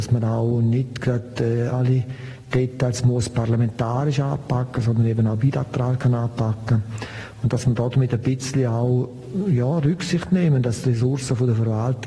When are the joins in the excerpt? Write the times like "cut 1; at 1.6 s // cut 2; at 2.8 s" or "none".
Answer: cut 1; at 1.7 s